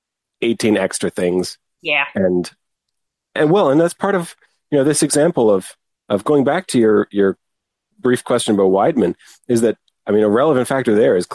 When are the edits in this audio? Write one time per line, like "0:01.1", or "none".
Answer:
none